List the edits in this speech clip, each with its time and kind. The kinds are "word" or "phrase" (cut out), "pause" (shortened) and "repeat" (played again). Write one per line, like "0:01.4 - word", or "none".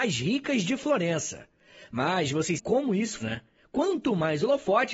0:02.6 - word
0:03.2 - word

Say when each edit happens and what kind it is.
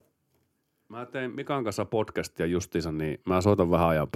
none

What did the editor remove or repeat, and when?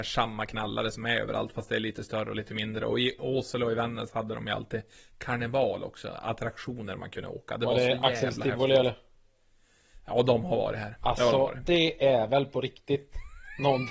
none

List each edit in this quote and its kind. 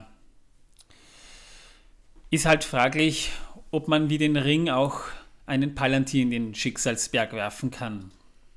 none

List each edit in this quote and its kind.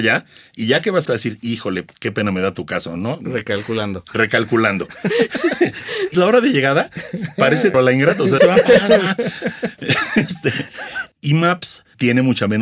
0:01.1 - phrase
0:01.9 - pause
0:06.1 - word
0:07.7 - word
0:08.4 - word
0:11.1 - pause

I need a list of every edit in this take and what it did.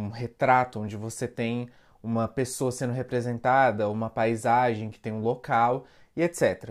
none

